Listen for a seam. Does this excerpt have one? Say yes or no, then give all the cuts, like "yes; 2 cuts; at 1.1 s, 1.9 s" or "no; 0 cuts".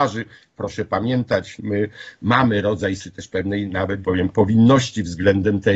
yes; 3 cuts; at 1.6 s, 3.0 s, 4.0 s